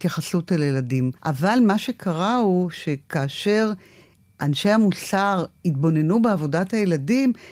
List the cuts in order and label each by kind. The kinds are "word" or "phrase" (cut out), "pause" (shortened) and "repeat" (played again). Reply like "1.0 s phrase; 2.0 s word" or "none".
1.2 s pause